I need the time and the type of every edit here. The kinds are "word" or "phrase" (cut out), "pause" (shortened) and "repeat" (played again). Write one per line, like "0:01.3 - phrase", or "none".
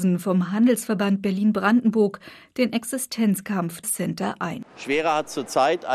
0:03.8 - word